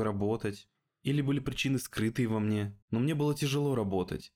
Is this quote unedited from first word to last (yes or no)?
no